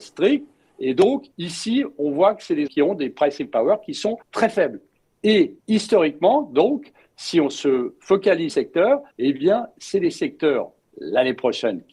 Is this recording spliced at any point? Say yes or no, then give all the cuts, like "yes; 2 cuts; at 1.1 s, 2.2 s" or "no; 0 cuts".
yes; 6 cuts; at 1.3 s, 2.7 s, 4.2 s, 5.6 s, 8.5 s, 9.1 s